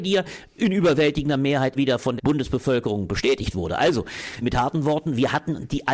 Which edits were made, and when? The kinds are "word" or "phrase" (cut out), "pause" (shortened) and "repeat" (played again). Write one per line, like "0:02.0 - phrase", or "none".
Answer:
0:01.7 - word
0:02.2 - word
0:04.4 - word